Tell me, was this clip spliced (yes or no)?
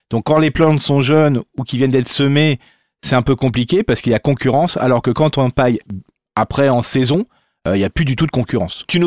no